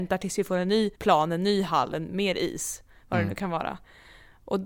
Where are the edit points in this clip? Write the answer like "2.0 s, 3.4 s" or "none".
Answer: 0.9 s

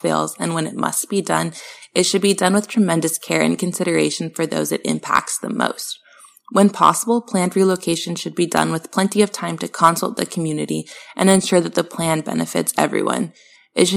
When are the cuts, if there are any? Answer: none

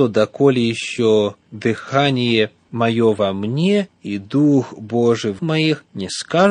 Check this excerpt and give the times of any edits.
1.4 s, 5.4 s

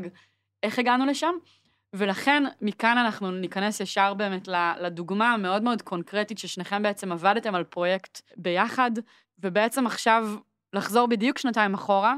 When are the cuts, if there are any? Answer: none

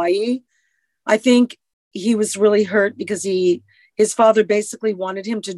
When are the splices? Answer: none

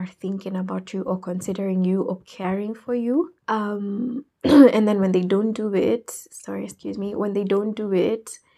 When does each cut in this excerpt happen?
3.4 s

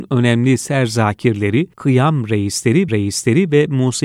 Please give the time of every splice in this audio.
1.7 s, 2.9 s

